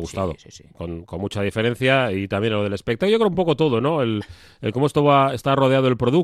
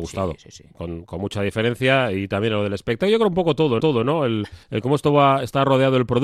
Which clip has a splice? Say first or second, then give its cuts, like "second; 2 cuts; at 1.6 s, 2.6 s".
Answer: second; 2 cuts; at 3.8 s, 4.6 s